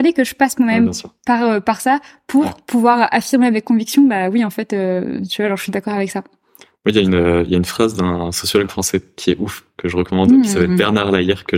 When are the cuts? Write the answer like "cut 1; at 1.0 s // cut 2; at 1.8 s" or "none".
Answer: none